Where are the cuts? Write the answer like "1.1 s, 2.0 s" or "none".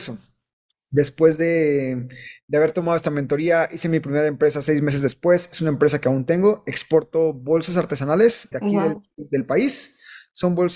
8.5 s, 9.1 s

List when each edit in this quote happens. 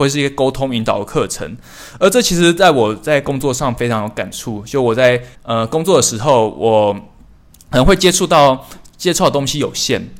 5.3 s

